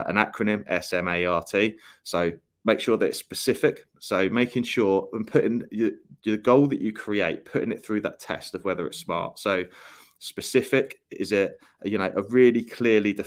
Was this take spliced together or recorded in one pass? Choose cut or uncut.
uncut